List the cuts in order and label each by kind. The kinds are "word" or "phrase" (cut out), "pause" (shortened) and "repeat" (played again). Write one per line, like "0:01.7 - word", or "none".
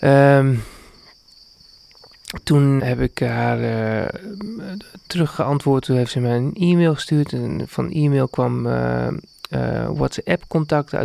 0:02.8 - word
0:05.1 - word